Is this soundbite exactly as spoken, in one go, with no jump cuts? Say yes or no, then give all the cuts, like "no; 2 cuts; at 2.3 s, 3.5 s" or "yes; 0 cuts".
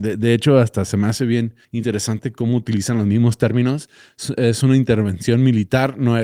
no; 1 cut; at 1.6 s